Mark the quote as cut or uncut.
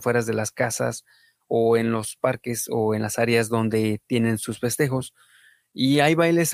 uncut